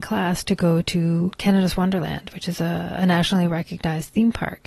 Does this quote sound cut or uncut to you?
uncut